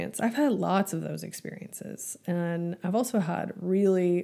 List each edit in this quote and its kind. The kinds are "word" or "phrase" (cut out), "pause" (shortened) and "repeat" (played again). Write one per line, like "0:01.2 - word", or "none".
none